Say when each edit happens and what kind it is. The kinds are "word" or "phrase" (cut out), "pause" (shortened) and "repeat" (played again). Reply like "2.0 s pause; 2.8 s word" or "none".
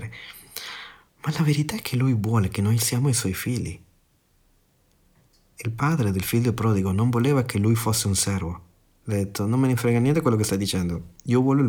none